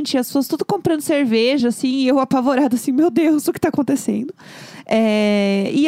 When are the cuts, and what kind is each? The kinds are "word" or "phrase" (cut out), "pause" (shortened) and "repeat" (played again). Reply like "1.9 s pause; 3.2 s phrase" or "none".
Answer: none